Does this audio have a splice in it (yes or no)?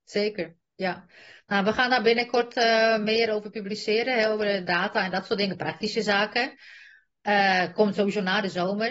no